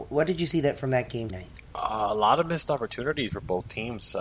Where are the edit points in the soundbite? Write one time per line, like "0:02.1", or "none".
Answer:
0:01.3
0:03.3